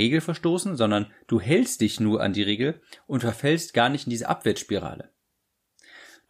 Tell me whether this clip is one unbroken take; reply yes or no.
yes